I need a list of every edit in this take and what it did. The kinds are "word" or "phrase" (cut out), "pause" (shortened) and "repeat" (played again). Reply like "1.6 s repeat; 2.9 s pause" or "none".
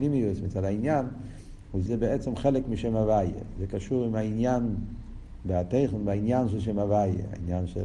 1.9 s word